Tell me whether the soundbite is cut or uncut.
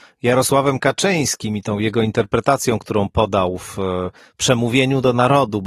uncut